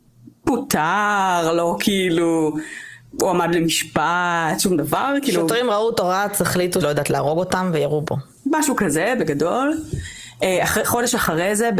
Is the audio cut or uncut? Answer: cut